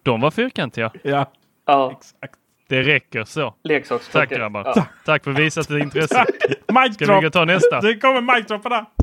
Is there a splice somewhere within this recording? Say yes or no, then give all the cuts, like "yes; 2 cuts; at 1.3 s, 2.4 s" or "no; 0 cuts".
no; 0 cuts